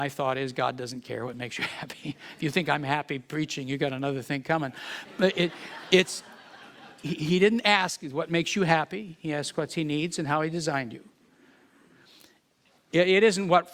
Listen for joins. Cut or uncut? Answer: uncut